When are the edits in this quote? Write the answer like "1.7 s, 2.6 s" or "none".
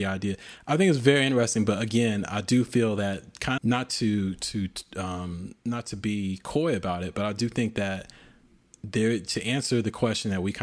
3.6 s